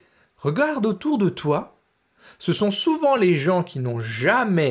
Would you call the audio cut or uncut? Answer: uncut